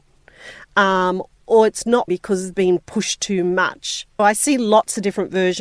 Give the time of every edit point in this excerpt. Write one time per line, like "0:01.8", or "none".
0:02.1
0:02.5
0:04.2

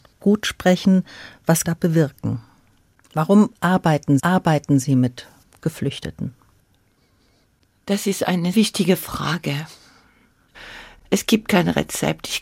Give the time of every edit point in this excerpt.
0:01.6
0:04.2
0:08.5

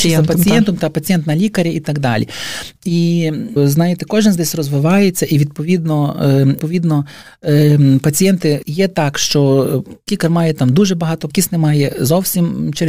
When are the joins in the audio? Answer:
0:03.6
0:04.4
0:06.6
0:08.6
0:10.1
0:11.3

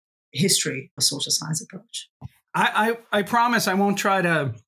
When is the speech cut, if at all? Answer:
0:01.0

